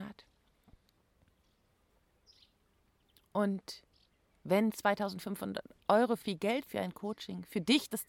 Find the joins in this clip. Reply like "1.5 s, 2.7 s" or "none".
4.1 s, 6.2 s, 6.7 s